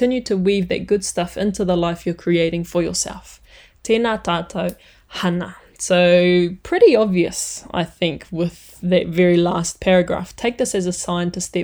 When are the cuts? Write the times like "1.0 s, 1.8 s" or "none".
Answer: none